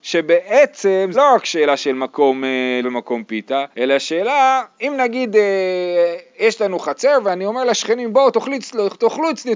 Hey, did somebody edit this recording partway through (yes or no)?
yes